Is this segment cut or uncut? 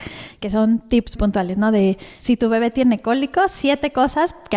cut